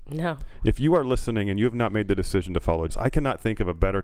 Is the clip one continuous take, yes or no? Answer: no